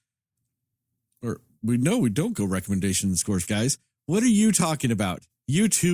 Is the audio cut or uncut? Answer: cut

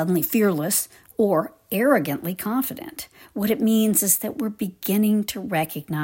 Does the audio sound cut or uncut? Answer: uncut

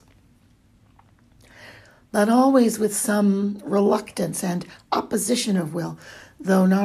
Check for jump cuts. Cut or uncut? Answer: uncut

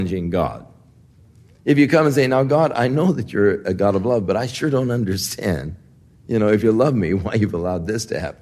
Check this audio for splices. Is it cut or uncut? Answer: uncut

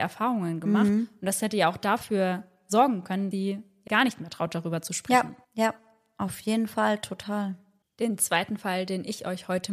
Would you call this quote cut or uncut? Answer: cut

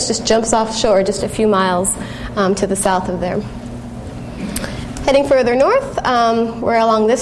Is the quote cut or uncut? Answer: uncut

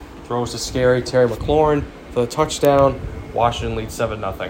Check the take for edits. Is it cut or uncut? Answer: uncut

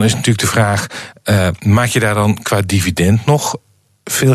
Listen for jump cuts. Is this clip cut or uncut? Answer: uncut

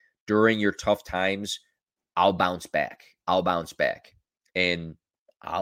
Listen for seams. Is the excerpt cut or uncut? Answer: uncut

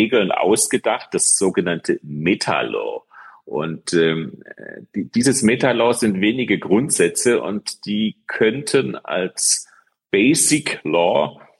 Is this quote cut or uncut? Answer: uncut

